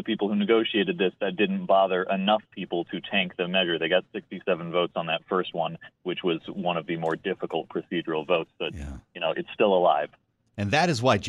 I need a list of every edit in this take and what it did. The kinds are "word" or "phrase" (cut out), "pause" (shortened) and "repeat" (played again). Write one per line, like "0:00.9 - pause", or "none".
0:10.3 - pause